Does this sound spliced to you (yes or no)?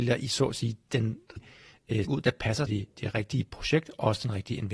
yes